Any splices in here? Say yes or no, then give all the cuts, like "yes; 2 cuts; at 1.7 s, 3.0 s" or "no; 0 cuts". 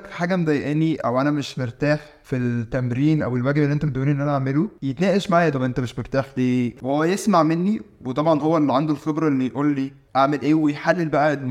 no; 0 cuts